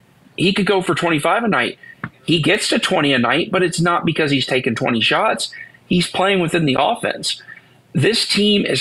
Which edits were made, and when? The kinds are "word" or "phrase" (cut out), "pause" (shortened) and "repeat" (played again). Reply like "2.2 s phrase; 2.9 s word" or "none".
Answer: none